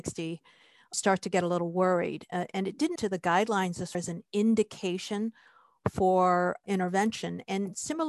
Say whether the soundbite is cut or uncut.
cut